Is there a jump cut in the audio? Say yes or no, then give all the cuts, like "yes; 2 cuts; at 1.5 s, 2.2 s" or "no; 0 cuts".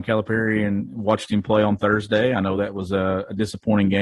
no; 0 cuts